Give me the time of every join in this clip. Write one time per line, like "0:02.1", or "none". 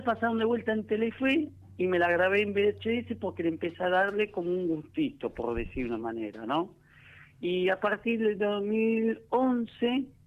none